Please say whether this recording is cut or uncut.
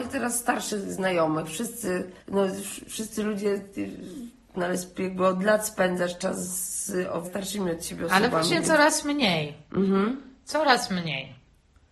cut